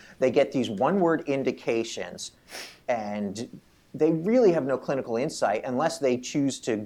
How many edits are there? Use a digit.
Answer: 0